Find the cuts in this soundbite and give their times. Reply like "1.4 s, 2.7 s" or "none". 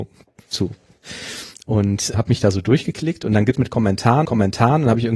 2.1 s, 3.5 s, 4.2 s

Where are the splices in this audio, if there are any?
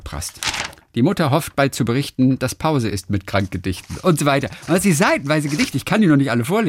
none

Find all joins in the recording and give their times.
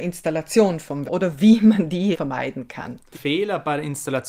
1.1 s, 2.1 s, 3.1 s

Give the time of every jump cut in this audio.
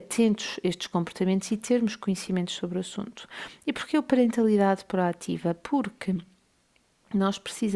none

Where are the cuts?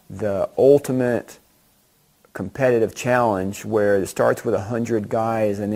none

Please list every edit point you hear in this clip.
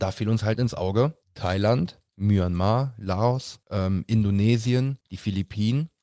1.2 s, 3.6 s, 5.0 s

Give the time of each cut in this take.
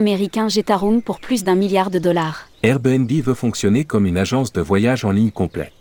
2.5 s

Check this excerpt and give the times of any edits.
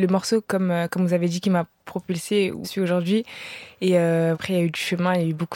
2.6 s, 4.3 s

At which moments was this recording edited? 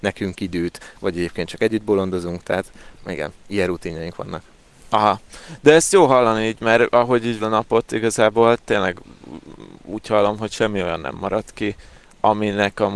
3.0 s, 7.4 s

